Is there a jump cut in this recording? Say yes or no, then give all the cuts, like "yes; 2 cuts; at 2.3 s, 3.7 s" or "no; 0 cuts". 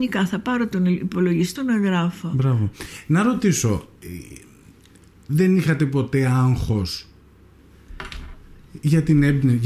yes; 1 cut; at 1.6 s